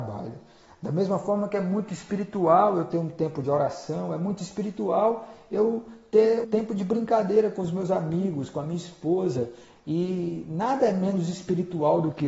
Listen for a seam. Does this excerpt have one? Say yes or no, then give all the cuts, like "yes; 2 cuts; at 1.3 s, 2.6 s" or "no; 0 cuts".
yes; 1 cut; at 6.4 s